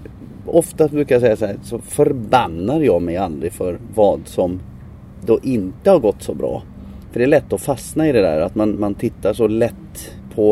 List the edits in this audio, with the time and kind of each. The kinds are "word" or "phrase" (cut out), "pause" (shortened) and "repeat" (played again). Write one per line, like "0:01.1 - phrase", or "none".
none